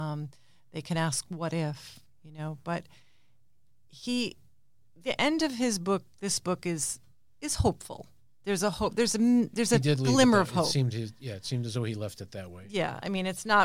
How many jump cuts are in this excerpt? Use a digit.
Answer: 0